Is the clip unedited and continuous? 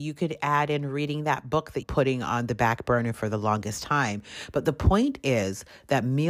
no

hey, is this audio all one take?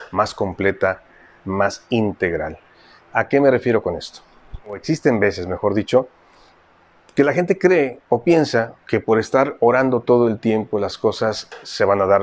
no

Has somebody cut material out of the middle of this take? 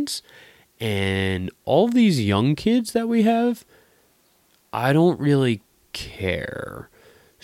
no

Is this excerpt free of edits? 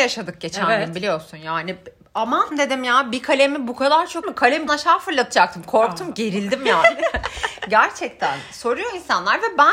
no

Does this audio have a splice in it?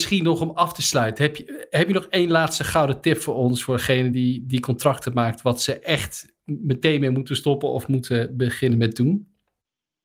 no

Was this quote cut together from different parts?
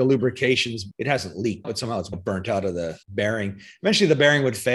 yes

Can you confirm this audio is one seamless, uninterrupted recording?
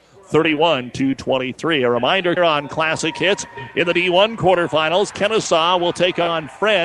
no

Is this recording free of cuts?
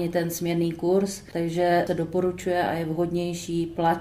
yes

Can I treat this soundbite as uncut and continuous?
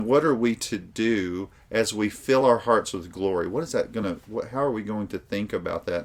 yes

